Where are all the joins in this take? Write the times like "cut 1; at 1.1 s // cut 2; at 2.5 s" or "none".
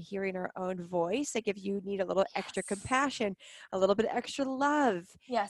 none